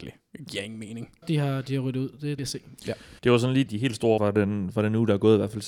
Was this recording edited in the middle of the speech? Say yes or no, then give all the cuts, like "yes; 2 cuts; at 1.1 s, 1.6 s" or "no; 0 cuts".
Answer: yes; 5 cuts; at 1.2 s, 2.4 s, 3.2 s, 3.7 s, 4.2 s